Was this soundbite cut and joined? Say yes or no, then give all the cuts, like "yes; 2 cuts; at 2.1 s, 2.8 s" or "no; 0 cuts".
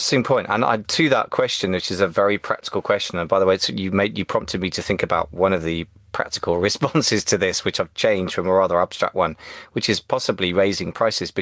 no; 0 cuts